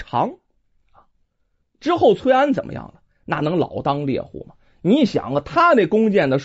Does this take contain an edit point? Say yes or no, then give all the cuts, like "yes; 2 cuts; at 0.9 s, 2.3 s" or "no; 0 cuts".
no; 0 cuts